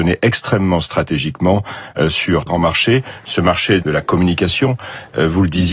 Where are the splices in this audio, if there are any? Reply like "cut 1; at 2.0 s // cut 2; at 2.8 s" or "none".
cut 1; at 2.5 s // cut 2; at 3.8 s